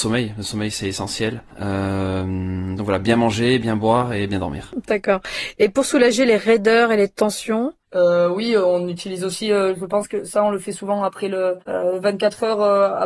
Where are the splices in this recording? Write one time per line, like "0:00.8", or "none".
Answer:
0:01.5
0:11.6